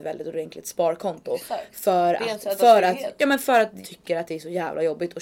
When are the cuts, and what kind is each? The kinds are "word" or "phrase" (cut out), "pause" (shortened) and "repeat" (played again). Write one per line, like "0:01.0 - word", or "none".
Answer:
0:03.8 - word